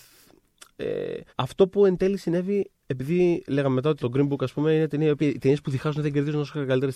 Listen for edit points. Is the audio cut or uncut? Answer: cut